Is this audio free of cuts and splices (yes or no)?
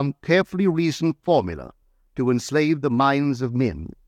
yes